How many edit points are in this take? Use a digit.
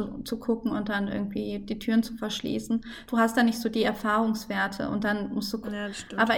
0